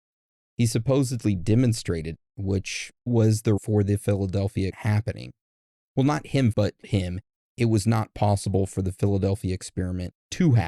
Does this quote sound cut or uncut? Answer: cut